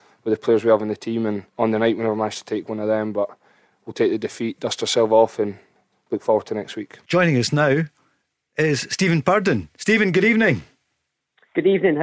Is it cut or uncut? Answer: uncut